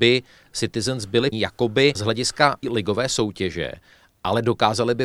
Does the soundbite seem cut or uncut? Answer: cut